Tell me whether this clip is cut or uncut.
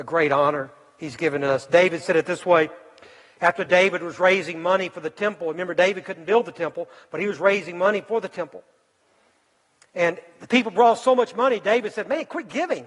uncut